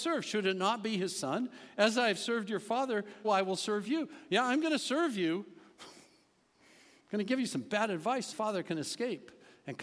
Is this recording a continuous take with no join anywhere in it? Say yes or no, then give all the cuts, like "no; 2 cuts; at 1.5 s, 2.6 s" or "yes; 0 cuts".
no; 2 cuts; at 3.2 s, 8.3 s